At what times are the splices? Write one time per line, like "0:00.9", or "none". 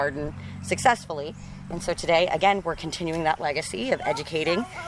none